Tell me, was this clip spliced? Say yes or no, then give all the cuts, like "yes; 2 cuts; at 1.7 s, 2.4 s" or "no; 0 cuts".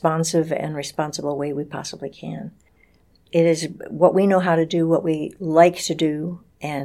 no; 0 cuts